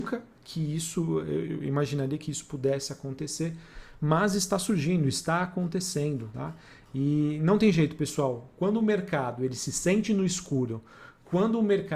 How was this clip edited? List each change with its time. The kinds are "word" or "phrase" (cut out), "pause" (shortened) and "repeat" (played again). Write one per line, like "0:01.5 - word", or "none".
none